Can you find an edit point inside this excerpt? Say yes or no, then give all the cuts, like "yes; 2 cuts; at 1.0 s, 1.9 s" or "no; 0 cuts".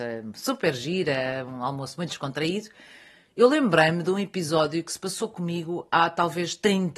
no; 0 cuts